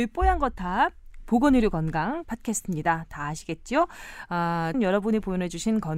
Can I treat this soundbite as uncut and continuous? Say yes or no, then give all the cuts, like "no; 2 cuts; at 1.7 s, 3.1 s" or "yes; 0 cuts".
no; 2 cuts; at 2.2 s, 4.7 s